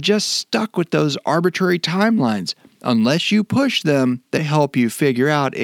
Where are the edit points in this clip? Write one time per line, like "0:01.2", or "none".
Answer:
0:04.4